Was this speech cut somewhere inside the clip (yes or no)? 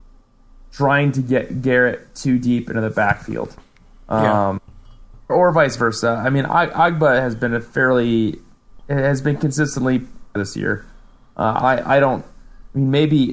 yes